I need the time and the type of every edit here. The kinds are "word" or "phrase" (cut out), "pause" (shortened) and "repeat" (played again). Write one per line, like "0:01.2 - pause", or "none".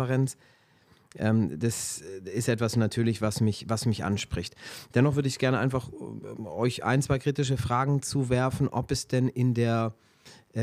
none